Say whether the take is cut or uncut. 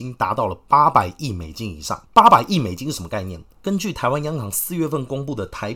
cut